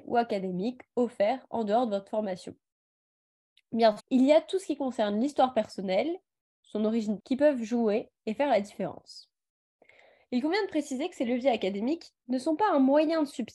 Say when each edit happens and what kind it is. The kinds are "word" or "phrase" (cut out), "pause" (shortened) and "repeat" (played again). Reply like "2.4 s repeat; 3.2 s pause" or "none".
4.0 s word; 7.2 s word